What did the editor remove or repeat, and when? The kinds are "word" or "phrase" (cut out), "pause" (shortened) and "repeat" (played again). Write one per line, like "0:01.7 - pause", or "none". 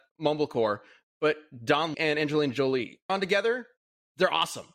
0:01.9 - word
0:03.1 - phrase